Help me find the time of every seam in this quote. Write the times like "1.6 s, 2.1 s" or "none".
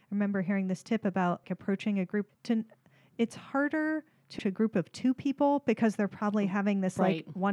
1.4 s, 2.3 s, 4.4 s